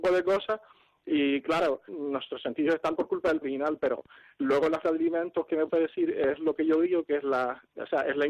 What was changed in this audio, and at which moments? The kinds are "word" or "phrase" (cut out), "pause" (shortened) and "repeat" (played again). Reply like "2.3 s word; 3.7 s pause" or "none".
1.9 s word; 2.9 s word; 3.4 s word; 4.8 s word; 5.7 s word